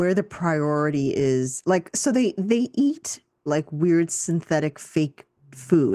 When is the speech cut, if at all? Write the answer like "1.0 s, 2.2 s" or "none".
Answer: 3.5 s